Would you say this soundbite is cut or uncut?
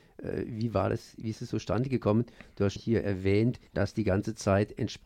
cut